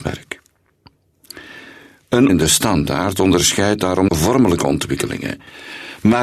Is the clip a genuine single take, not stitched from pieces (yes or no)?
no